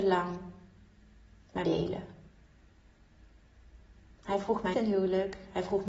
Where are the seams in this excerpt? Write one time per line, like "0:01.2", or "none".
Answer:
0:01.6
0:04.7